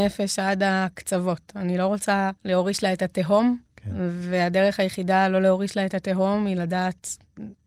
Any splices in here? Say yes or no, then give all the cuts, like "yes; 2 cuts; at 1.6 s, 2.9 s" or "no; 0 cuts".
yes; 2 cuts; at 2.4 s, 3.6 s